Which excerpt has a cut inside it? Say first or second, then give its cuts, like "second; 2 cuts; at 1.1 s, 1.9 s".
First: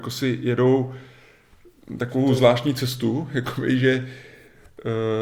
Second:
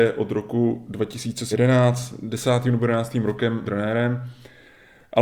second; 2 cuts; at 1.5 s, 3.6 s